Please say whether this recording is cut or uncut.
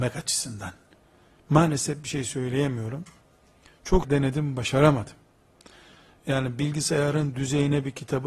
cut